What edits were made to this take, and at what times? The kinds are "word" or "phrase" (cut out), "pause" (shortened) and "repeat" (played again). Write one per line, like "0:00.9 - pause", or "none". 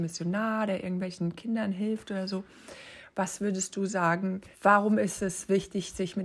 0:04.5 - pause